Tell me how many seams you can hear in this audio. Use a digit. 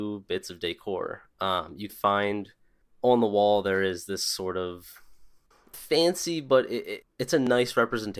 3